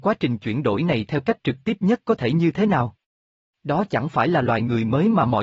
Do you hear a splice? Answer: no; 0 cuts

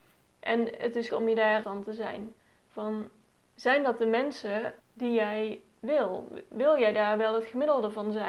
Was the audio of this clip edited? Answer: yes; 4 cuts; at 1.1 s, 1.6 s, 3.4 s, 4.8 s

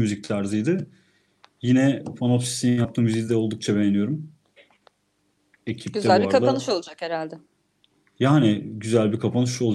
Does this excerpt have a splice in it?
no; 0 cuts

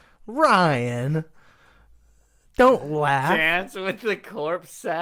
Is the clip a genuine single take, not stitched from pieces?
yes; 0 cuts

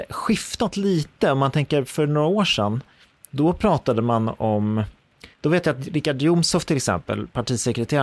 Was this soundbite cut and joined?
yes; 1 cut; at 5.3 s

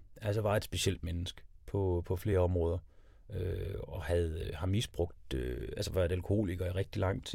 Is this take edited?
no; 0 cuts

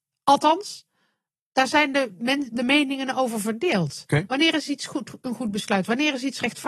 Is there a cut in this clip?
no; 0 cuts

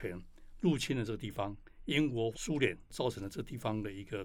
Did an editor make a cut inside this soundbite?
yes; 1 cut; at 2.3 s

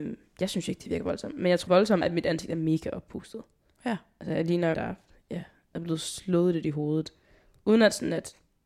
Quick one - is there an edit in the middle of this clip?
yes; 3 cuts; at 1.7 s, 2.0 s, 4.7 s

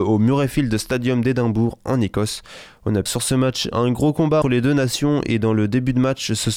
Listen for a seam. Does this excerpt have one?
yes; 2 cuts; at 3.1 s, 4.4 s

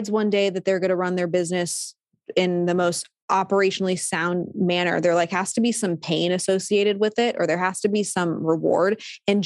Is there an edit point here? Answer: no; 0 cuts

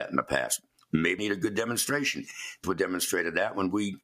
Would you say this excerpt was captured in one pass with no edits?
no; 2 cuts; at 1.2 s, 2.6 s

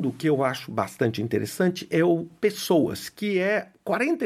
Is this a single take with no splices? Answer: yes; 0 cuts

